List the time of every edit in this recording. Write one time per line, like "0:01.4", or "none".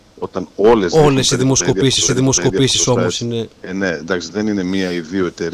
0:02.1
0:03.5